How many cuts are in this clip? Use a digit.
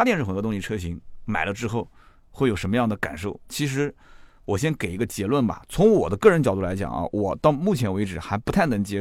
0